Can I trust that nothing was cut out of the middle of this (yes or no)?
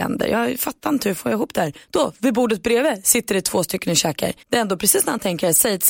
no